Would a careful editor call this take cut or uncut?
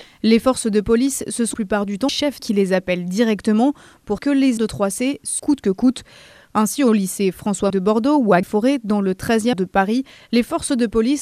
cut